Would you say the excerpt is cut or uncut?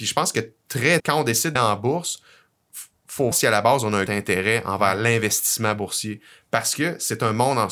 cut